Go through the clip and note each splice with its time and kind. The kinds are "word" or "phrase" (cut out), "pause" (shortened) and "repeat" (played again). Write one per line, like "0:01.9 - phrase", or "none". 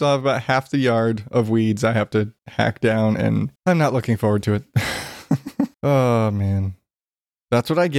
0:02.4 - pause
0:03.6 - pause
0:05.7 - pause